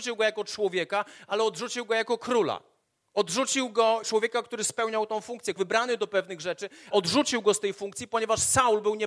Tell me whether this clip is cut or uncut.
cut